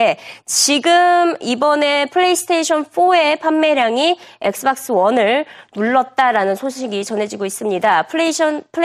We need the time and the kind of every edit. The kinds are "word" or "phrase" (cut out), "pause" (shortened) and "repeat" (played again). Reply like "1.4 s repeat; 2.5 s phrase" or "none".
none